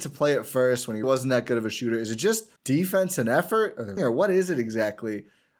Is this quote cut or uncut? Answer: cut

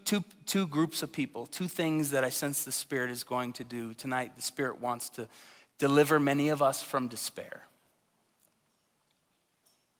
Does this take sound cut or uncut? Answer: uncut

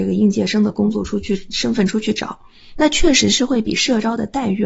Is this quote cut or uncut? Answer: uncut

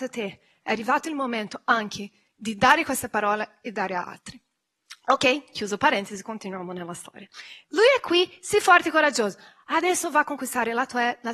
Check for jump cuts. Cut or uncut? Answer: uncut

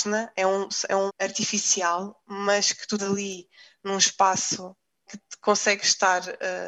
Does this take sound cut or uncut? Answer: cut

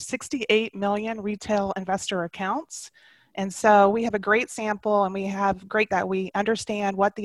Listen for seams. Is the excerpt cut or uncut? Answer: cut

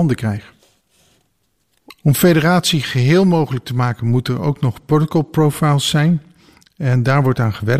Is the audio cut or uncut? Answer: uncut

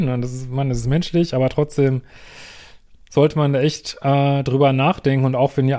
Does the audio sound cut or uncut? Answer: uncut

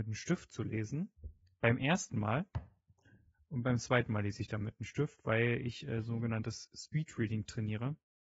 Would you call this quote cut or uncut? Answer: uncut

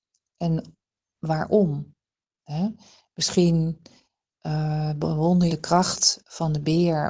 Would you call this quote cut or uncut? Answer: cut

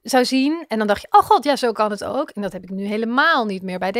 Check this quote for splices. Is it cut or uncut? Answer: uncut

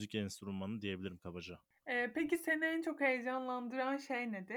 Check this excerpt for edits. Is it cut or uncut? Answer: uncut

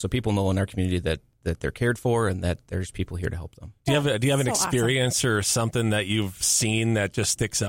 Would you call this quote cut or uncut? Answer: uncut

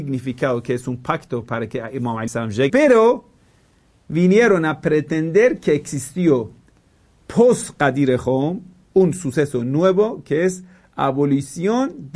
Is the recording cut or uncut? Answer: cut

